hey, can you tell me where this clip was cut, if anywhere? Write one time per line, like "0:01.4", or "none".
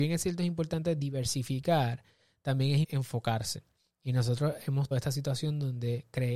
0:02.8
0:04.9